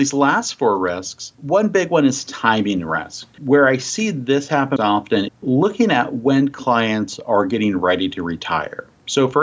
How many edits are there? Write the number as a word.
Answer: four